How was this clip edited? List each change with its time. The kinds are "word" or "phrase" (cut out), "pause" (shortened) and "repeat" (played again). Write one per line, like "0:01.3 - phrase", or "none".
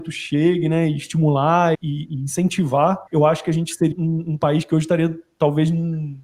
0:01.7 - word
0:03.1 - pause
0:03.9 - word

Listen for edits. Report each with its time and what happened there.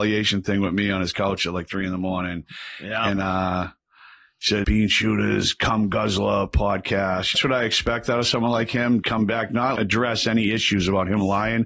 0:04.6 - word
0:07.3 - phrase
0:09.0 - word
0:09.8 - word

